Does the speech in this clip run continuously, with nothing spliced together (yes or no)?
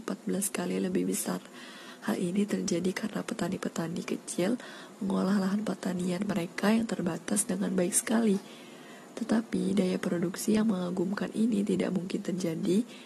yes